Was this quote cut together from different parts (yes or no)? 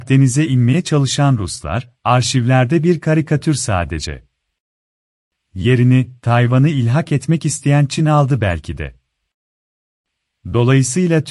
no